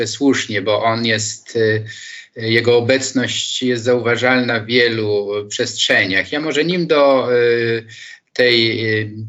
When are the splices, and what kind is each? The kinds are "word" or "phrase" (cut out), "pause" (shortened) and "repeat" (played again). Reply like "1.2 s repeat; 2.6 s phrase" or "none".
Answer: none